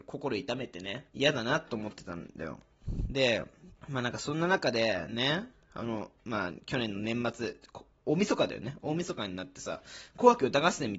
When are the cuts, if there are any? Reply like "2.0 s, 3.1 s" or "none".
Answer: 1.1 s, 3.8 s, 6.2 s